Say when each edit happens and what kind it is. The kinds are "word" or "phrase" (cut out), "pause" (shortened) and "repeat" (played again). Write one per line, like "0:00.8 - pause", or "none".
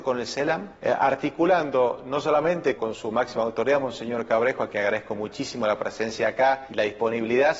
0:02.8 - word